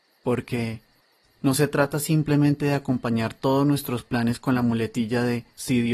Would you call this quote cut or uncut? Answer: uncut